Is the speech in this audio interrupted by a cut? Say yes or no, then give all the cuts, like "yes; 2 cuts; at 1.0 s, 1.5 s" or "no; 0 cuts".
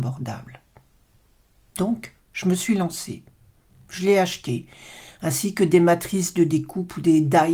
no; 0 cuts